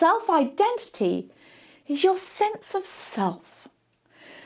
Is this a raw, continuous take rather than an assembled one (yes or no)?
yes